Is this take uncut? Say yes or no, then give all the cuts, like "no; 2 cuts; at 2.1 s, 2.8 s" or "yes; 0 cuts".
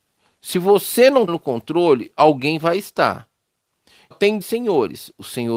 no; 3 cuts; at 1.3 s, 4.1 s, 4.4 s